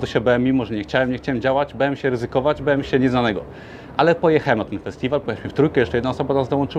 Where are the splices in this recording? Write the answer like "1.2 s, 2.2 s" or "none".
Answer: 5.2 s

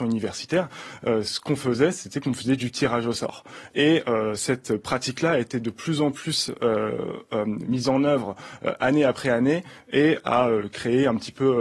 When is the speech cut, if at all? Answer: none

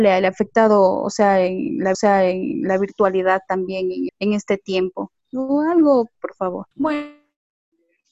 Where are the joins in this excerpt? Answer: 1.9 s, 4.1 s, 6.2 s, 6.7 s

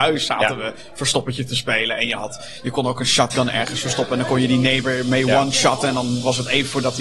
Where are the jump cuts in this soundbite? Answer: none

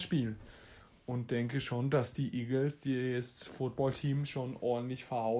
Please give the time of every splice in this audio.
none

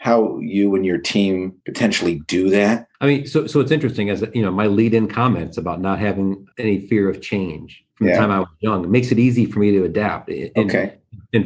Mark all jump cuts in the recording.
1.6 s, 2.9 s, 6.5 s, 7.9 s

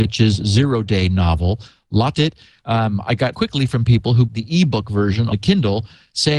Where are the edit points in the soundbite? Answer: 2.1 s, 3.3 s, 4.3 s, 5.3 s

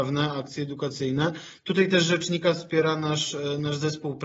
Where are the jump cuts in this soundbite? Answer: none

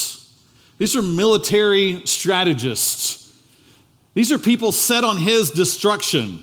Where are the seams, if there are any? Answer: none

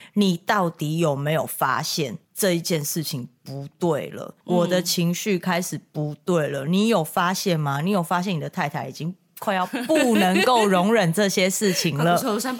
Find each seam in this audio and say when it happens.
2.2 s, 4.4 s

